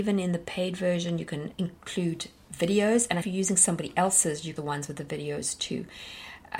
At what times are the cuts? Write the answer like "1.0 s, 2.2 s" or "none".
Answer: 1.5 s, 3.2 s, 4.6 s